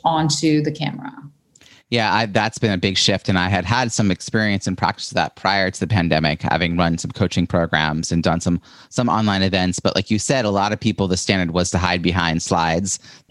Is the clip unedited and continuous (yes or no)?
yes